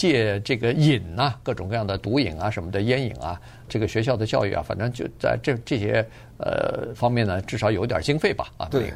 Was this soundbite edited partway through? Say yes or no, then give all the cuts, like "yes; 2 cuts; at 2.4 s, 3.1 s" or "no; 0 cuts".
yes; 1 cut; at 3.7 s